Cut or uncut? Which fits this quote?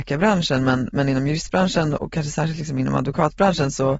uncut